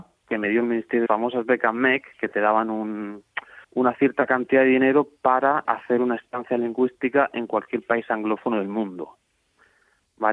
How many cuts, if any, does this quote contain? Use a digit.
4